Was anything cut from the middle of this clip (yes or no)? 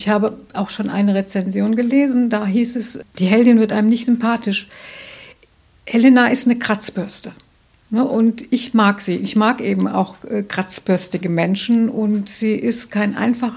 no